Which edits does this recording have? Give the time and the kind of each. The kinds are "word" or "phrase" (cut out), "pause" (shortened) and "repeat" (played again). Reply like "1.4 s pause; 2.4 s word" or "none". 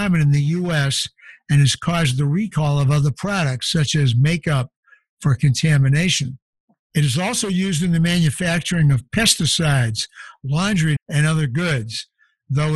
11.0 s word